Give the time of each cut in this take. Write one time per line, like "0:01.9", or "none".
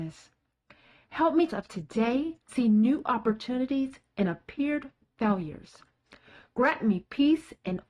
0:01.5
0:02.5